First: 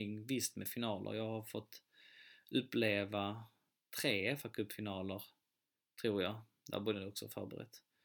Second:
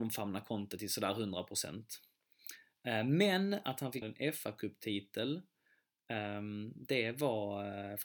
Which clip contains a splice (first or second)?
second